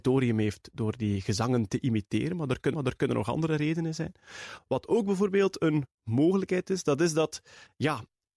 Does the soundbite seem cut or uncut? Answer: cut